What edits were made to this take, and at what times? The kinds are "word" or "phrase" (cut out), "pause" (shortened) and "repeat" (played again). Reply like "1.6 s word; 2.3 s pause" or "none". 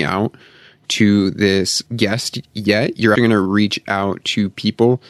3.2 s word